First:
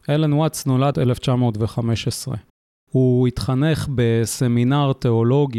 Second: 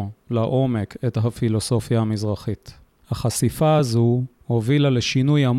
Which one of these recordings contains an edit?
first; 1 cut; at 0.9 s

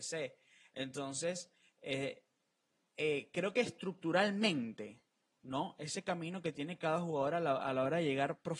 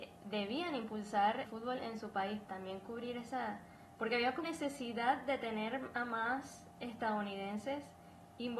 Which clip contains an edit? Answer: second; 3 cuts; at 1.5 s, 2.4 s, 4.4 s

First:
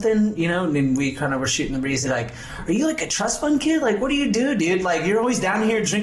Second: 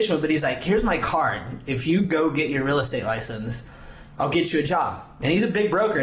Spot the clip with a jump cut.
first; 1 cut; at 2.1 s

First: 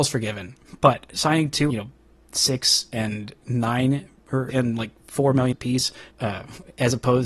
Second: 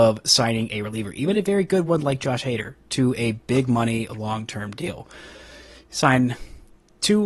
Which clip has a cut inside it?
first; 5 cuts; at 1.1 s, 1.7 s, 4.5 s, 5.5 s, 6.1 s

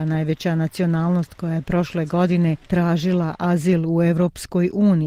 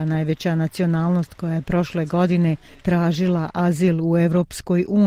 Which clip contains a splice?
first; 1 cut; at 2.6 s

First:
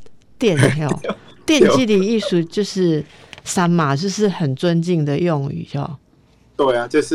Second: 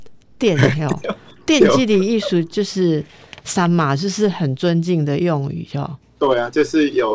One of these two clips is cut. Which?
second; 1 cut; at 6.0 s

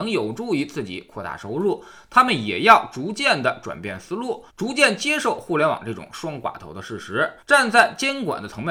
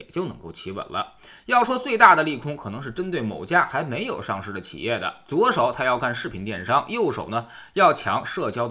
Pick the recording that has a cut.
first; 2 cuts; at 4.5 s, 7.4 s

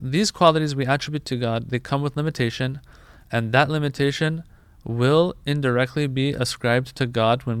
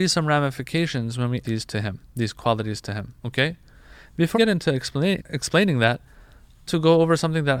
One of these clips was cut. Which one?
second; 6 cuts; at 1.4 s, 2.0 s, 3.2 s, 4.3 s, 5.2 s, 6.7 s

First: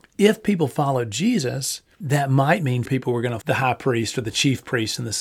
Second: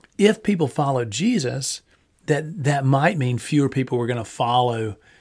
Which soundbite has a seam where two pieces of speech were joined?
first; 3 cuts; at 2.0 s, 2.9 s, 3.4 s

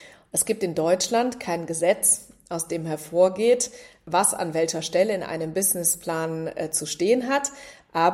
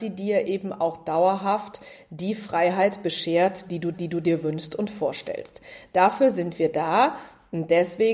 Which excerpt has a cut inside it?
second; 1 cut; at 3.9 s

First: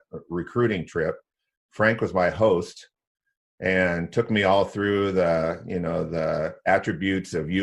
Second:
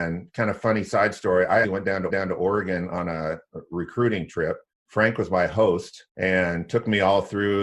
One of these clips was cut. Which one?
second; 4 cuts; at 1.6 s, 2.1 s, 4.7 s, 6.1 s

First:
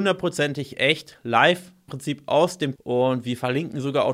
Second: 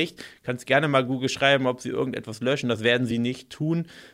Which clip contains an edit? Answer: first; 2 cuts; at 1.9 s, 2.8 s

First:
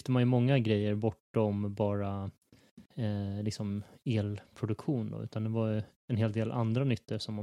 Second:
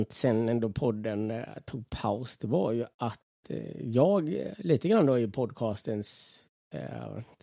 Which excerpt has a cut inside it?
first; 1 cut; at 2.9 s

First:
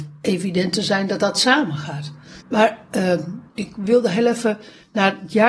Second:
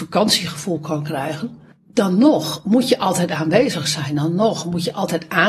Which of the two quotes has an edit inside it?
first; 2 cuts; at 2.4 s, 3.5 s

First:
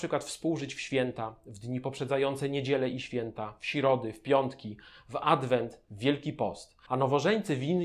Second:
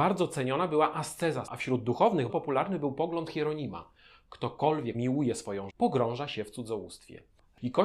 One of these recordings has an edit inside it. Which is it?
second; 5 cuts; at 1.5 s, 2.3 s, 3.3 s, 4.9 s, 5.7 s

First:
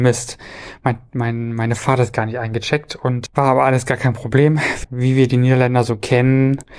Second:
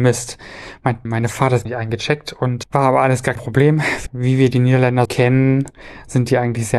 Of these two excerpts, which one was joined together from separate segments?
second; 4 cuts; at 1.0 s, 1.6 s, 3.3 s, 5.0 s

